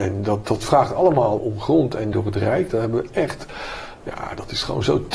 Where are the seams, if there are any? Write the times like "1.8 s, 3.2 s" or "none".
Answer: 1.4 s, 2.1 s